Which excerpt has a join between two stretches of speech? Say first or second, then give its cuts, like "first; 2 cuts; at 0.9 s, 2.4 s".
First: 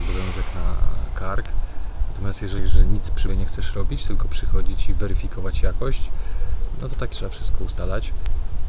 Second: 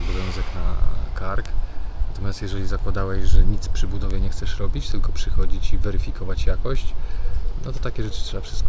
first; 3 cuts; at 2.6 s, 3.3 s, 7.1 s